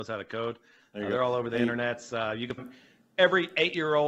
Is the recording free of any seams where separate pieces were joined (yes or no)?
no